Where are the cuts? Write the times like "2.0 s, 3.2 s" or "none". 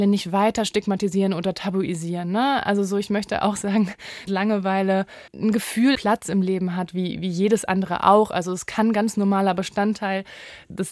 4.3 s, 5.3 s, 6.0 s